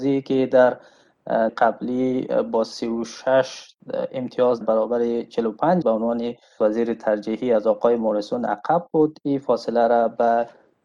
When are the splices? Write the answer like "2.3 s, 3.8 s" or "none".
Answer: 1.5 s, 4.6 s, 5.8 s, 6.6 s